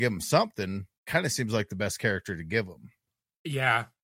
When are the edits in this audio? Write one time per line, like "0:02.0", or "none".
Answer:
0:01.0